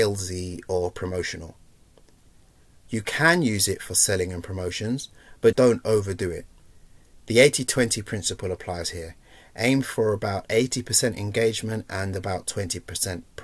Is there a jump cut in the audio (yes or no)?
yes